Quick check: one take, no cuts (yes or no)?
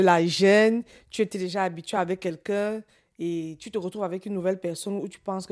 yes